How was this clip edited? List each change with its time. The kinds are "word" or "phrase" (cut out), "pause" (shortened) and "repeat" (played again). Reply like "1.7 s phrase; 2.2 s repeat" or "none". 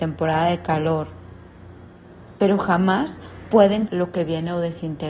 3.9 s word